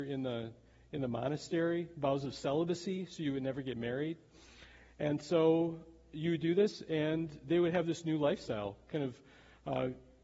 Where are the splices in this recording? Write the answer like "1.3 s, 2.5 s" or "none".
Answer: none